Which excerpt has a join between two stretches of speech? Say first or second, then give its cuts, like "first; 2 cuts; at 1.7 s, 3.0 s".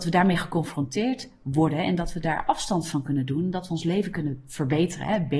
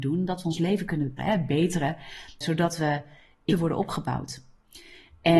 second; 3 cuts; at 1.2 s, 2.4 s, 3.5 s